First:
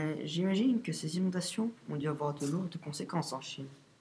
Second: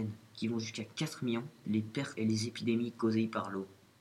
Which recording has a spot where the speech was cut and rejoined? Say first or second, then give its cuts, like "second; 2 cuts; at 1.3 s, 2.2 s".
second; 2 cuts; at 1.6 s, 2.1 s